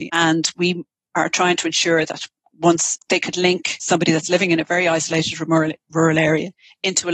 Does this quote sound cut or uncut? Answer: uncut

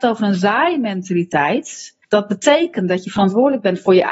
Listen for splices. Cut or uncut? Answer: cut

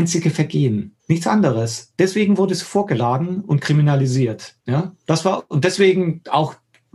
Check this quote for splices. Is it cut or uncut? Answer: cut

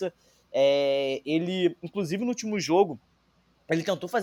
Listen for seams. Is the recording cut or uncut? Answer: uncut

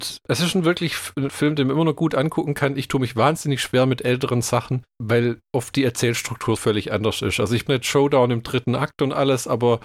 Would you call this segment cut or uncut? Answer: cut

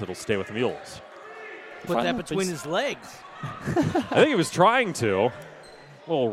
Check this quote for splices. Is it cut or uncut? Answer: cut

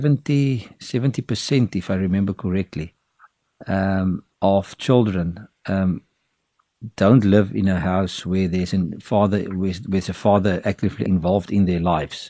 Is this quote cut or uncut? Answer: cut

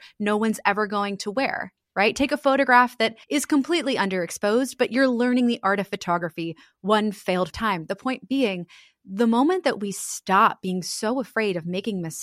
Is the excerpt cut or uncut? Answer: cut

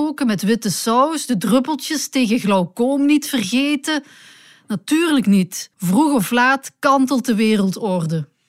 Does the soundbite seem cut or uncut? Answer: cut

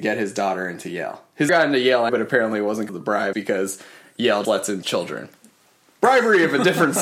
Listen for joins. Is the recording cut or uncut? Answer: cut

